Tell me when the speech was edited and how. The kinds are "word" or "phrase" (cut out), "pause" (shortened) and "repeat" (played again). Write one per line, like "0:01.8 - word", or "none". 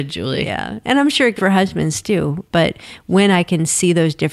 0:01.4 - word